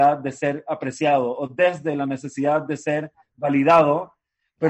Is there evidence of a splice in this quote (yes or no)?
no